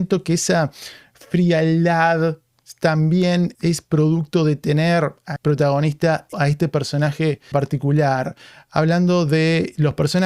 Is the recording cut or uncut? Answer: cut